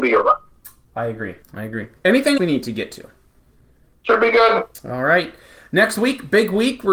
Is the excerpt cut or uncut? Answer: cut